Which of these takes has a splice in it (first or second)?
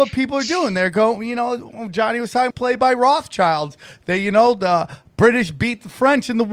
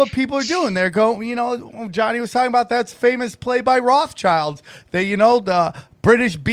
first